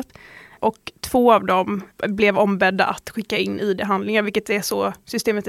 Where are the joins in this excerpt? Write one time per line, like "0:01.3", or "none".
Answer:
none